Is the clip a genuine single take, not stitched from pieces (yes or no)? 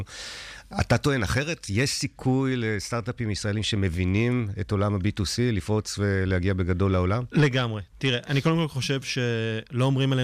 no